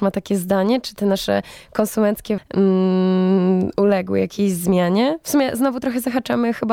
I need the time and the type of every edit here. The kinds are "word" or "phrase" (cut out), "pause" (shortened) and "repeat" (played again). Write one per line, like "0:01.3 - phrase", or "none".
0:02.4 - word